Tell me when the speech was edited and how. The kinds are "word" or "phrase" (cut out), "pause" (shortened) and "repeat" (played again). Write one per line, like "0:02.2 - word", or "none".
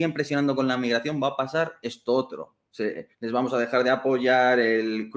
0:03.1 - pause